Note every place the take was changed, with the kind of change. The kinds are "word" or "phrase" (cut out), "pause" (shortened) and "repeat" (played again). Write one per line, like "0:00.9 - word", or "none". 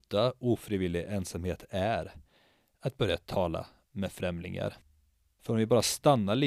none